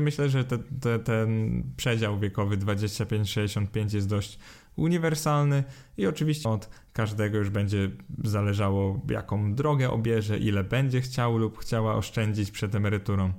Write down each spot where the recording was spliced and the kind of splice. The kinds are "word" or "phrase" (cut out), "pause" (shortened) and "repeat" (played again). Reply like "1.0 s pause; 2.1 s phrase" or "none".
6.4 s word

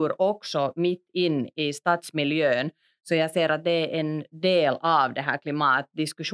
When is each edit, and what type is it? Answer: none

